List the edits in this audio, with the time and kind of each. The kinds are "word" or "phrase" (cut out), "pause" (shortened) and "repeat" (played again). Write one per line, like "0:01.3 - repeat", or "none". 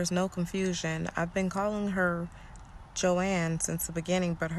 none